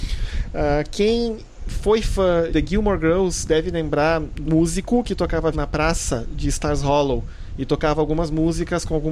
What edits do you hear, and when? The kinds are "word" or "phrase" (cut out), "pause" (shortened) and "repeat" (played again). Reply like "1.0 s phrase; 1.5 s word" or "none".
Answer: 2.5 s word; 4.5 s word; 5.5 s word